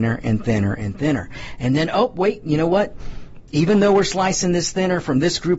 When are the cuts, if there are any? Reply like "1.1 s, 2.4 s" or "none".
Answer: none